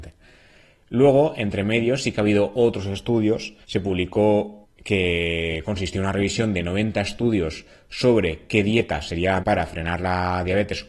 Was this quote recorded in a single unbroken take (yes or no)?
no